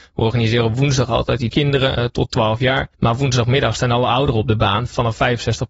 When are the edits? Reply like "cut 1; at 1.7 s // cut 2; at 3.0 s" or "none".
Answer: cut 1; at 1.5 s // cut 2; at 2.0 s // cut 3; at 2.9 s